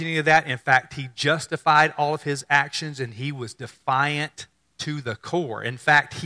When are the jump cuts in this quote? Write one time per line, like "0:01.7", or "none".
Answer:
0:04.6